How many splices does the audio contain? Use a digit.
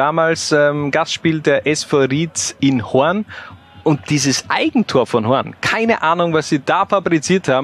0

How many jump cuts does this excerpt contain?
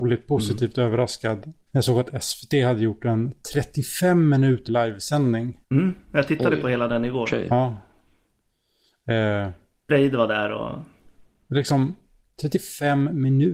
3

